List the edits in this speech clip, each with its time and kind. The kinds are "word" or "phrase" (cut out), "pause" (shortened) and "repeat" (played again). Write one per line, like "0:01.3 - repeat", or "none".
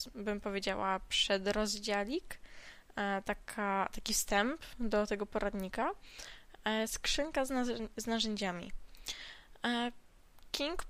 none